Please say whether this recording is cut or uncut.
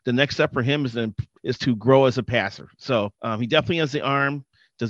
cut